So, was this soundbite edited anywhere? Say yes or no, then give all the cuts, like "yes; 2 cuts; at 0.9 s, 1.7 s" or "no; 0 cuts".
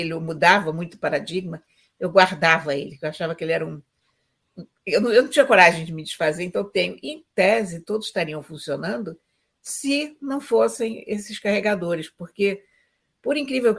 no; 0 cuts